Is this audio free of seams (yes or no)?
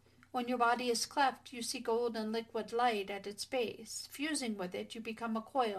yes